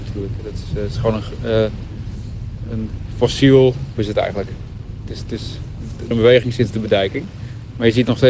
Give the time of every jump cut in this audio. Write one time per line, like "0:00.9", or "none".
0:03.9
0:06.1